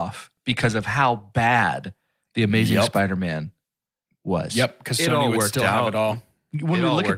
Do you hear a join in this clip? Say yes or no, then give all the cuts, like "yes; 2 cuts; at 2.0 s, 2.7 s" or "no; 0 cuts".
no; 0 cuts